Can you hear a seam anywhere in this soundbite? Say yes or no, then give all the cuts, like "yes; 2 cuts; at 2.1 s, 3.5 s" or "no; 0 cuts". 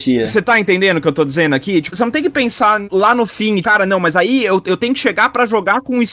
yes; 1 cut; at 3.6 s